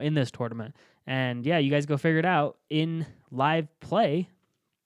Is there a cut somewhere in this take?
no; 0 cuts

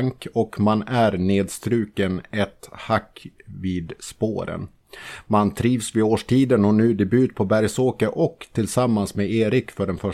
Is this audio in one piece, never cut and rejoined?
yes; 0 cuts

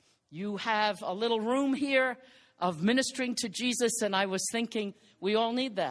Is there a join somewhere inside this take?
no; 0 cuts

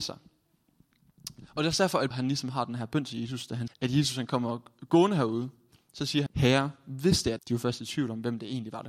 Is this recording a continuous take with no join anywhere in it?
no; 4 cuts; at 2.1 s, 3.7 s, 6.3 s, 7.4 s

